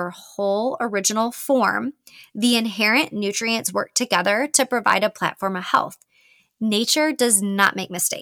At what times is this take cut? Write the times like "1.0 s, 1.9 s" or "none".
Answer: none